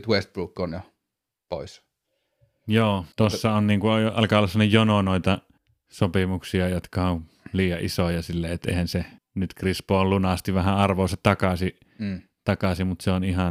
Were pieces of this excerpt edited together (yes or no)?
yes